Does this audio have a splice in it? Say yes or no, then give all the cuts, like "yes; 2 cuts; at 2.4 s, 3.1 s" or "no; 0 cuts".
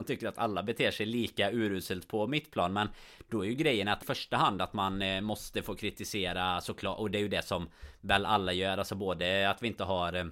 yes; 1 cut; at 4.0 s